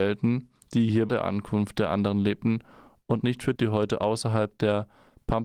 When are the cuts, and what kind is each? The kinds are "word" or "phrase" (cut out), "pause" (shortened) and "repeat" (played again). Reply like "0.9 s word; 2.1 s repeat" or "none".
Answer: 1.1 s phrase; 3.2 s word; 3.6 s word